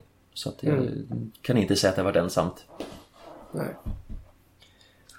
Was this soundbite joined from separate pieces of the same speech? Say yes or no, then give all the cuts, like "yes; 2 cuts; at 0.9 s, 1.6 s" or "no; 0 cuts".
no; 0 cuts